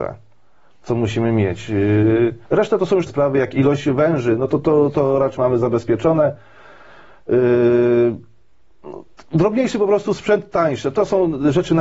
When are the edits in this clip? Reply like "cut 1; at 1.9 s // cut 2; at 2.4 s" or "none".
cut 1; at 2.4 s // cut 2; at 3.1 s // cut 3; at 5.4 s